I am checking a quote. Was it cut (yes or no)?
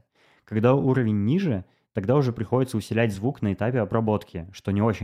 no